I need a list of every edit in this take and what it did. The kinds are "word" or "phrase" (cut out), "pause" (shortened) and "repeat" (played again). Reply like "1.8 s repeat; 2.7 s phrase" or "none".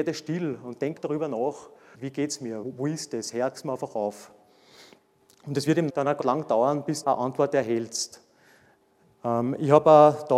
1.0 s word; 1.9 s word; 2.6 s word; 3.5 s word; 5.9 s word; 6.2 s word; 7.0 s word